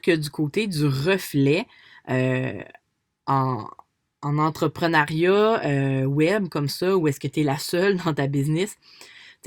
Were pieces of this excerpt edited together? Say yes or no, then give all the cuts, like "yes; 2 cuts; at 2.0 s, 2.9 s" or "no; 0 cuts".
no; 0 cuts